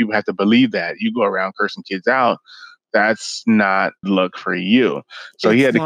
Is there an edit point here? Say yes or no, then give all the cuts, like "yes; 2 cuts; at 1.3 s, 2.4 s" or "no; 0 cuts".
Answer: yes; 1 cut; at 4.0 s